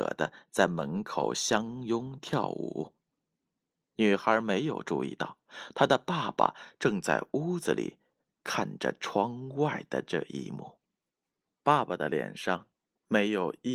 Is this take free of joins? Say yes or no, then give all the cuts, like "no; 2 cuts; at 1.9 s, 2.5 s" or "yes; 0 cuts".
yes; 0 cuts